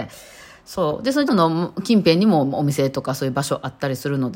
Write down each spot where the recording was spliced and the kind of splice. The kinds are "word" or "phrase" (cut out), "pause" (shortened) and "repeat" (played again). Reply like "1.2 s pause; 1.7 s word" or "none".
1.3 s word